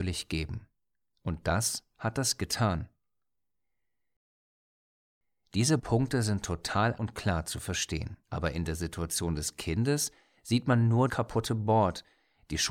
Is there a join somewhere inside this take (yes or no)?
yes